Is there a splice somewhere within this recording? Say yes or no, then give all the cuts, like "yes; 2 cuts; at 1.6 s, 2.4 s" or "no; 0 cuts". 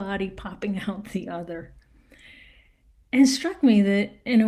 no; 0 cuts